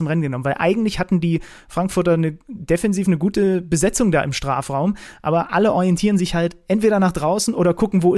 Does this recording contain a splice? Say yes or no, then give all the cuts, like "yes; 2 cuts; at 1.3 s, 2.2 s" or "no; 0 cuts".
no; 0 cuts